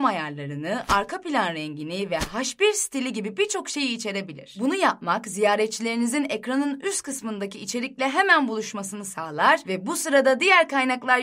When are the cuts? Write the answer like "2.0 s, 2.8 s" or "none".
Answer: none